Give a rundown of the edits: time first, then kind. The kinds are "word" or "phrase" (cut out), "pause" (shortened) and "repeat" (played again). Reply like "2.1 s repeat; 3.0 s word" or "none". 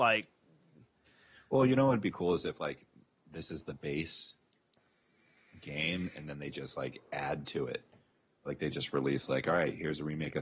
none